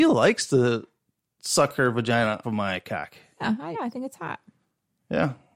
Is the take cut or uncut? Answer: cut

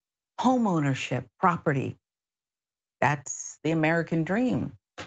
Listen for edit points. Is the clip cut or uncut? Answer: uncut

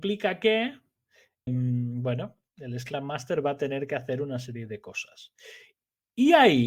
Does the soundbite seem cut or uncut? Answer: cut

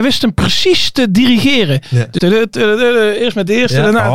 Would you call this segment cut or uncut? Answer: cut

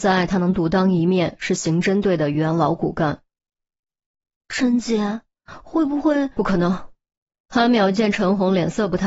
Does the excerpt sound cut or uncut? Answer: uncut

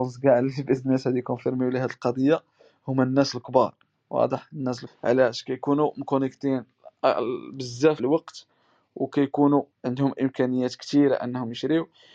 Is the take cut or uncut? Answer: cut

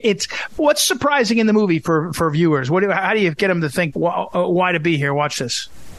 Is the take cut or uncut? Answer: cut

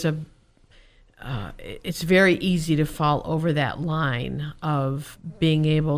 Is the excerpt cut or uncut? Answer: uncut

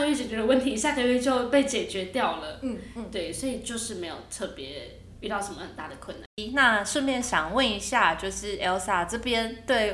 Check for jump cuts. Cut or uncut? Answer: uncut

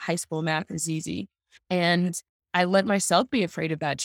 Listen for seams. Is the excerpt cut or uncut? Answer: cut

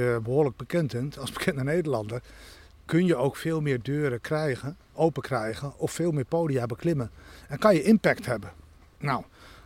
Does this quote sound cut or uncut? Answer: uncut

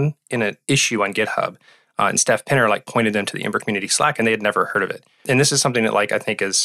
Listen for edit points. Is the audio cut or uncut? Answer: uncut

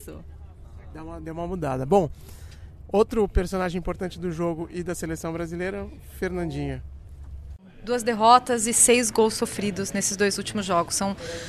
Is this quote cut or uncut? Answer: uncut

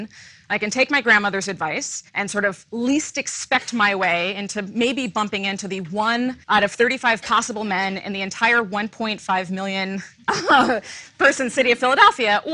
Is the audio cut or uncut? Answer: cut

